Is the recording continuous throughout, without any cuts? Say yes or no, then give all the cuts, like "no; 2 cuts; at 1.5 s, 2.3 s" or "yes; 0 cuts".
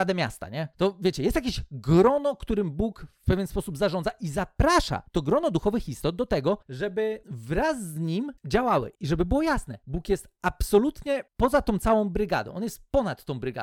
no; 1 cut; at 11.3 s